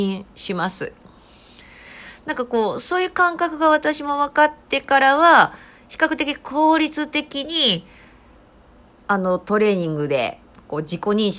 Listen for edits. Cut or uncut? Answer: uncut